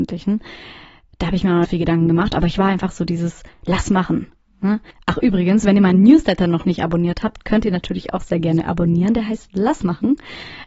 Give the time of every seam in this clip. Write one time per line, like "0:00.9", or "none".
0:01.6